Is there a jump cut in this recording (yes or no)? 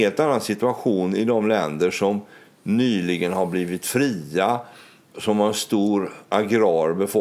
no